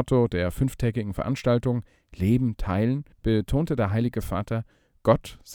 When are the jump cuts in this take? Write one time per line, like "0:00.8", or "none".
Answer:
0:03.1